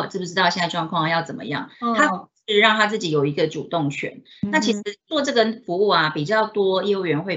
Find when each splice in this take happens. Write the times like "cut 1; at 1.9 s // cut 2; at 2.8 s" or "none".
cut 1; at 1.7 s // cut 2; at 5.0 s